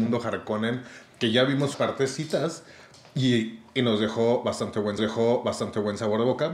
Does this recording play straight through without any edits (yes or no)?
no